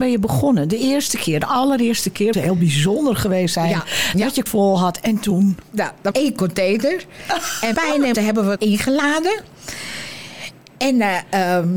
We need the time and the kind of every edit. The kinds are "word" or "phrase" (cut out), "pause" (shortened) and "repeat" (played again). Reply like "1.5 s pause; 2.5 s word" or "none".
2.3 s word; 4.5 s word; 6.1 s word; 7.7 s word; 8.1 s word; 8.6 s word